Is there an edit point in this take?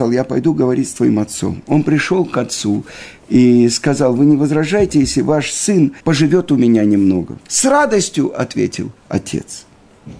yes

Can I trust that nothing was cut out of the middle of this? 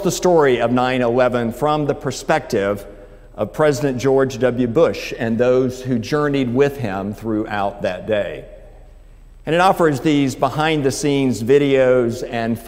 yes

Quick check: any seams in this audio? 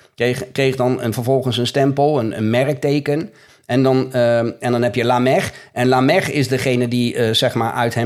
no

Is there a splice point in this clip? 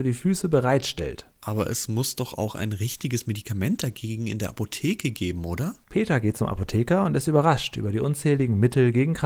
yes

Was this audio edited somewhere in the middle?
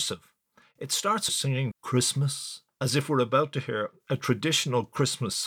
yes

